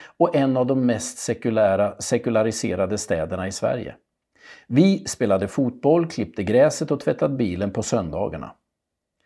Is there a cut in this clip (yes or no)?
no